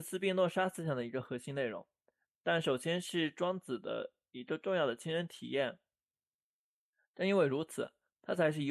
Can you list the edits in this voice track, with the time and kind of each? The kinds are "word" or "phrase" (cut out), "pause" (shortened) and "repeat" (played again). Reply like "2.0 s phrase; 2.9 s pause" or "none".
none